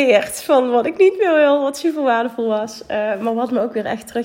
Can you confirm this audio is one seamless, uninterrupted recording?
yes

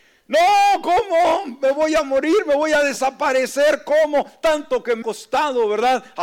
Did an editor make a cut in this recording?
yes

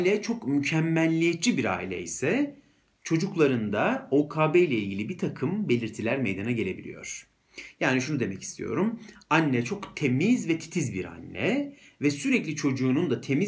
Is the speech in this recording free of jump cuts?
yes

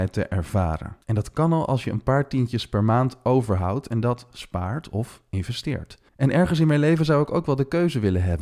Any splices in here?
yes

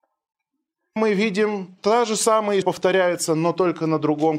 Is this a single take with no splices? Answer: no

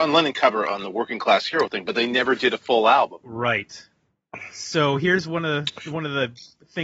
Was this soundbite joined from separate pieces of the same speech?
no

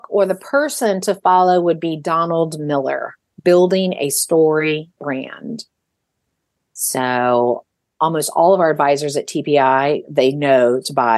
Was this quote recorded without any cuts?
yes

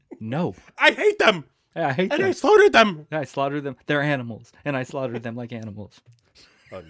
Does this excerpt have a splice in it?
no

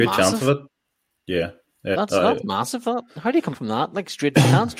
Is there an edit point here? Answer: yes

